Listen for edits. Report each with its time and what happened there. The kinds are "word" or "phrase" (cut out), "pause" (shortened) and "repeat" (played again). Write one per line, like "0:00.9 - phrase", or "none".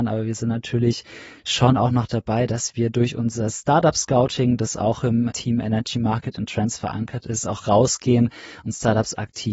none

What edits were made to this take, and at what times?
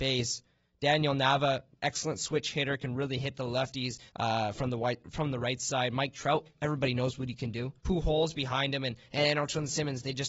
0:04.1 - pause
0:07.8 - pause

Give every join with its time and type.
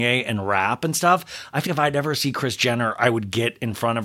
0:01.7 - word

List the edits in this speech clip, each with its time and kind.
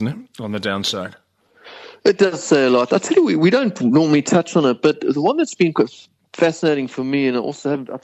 none

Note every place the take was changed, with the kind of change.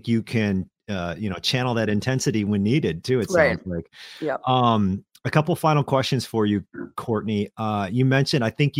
none

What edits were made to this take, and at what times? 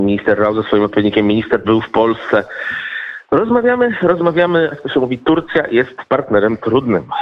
0:01.6 - word
0:04.7 - word

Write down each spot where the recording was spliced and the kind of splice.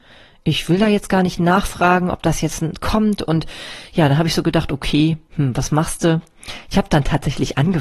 none

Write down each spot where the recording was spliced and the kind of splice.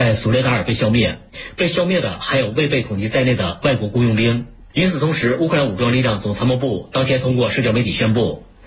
0:04.7 - pause

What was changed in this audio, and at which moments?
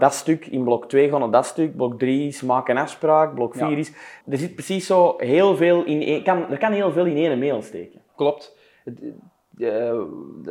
0:04.2 - pause
0:08.1 - pause

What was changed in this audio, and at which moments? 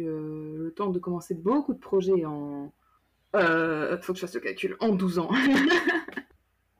none

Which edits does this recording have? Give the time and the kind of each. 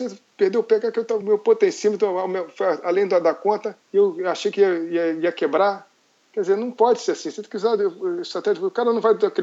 0:01.2 - word
0:03.8 - pause

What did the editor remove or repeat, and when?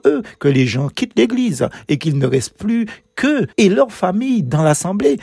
0:03.5 - pause

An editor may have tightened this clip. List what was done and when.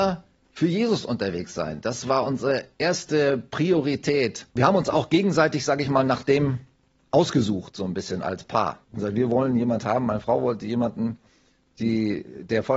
0:02.7 - pause
0:04.5 - pause
0:08.8 - pause

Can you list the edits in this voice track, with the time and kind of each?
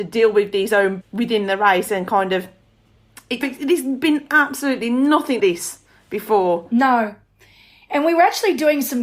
0:01.0 - word
0:03.4 - word
0:05.4 - word

